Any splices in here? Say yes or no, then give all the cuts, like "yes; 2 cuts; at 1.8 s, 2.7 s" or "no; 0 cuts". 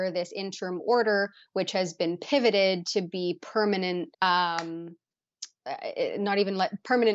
yes; 1 cut; at 4.1 s